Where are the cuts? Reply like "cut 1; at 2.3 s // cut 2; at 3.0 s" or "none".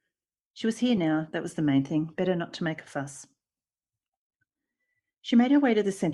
none